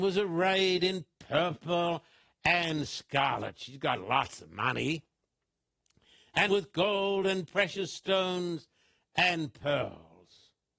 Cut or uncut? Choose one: cut